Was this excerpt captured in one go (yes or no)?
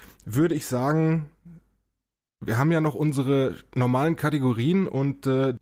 yes